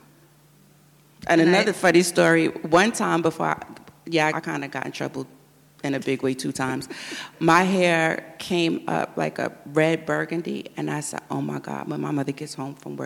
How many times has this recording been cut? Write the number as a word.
one